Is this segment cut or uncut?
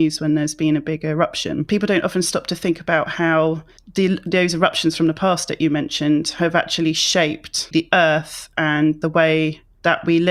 uncut